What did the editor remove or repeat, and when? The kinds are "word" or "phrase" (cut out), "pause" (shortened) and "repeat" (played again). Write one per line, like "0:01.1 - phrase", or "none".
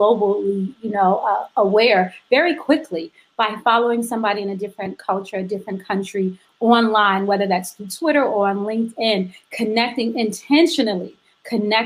none